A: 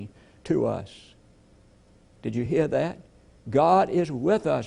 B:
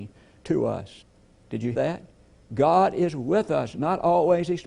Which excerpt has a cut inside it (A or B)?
B